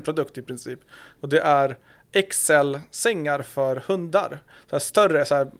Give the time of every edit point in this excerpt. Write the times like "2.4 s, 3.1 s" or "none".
none